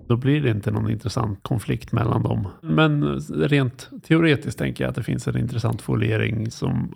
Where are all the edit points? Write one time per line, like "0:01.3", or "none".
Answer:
0:02.6